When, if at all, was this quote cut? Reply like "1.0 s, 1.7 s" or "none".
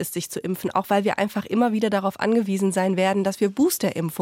none